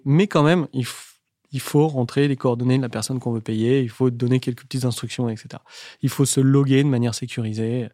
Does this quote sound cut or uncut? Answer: uncut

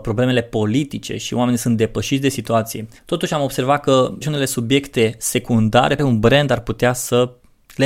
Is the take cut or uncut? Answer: cut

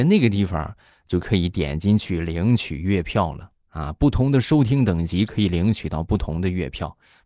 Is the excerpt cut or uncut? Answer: uncut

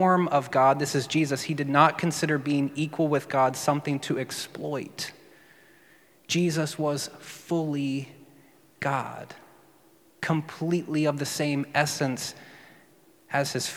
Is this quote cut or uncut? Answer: uncut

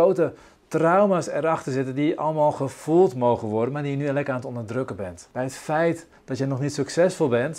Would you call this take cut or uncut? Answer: uncut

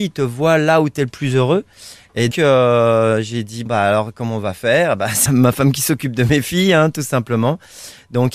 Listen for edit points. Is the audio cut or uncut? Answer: cut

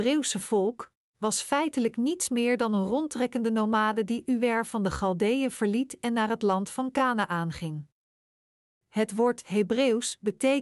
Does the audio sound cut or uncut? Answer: uncut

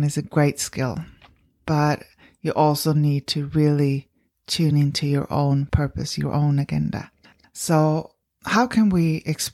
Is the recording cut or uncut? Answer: uncut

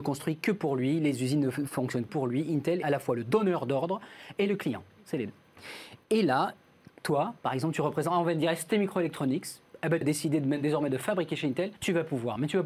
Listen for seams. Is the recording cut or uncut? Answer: cut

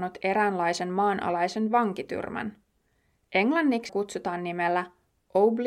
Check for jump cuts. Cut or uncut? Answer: cut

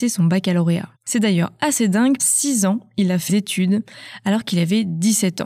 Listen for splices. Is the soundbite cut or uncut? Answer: cut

